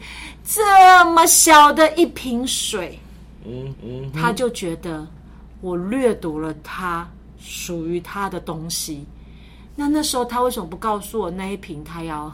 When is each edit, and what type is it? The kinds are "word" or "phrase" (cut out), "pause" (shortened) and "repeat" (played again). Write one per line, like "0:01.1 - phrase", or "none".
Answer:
0:03.7 - repeat